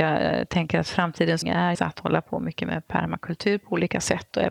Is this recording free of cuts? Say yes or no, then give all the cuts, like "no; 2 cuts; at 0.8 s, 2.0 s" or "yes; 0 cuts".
no; 2 cuts; at 1.4 s, 1.7 s